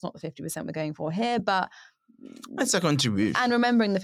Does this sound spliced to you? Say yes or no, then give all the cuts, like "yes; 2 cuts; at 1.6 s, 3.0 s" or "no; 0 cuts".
no; 0 cuts